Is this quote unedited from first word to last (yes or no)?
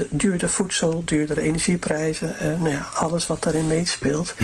yes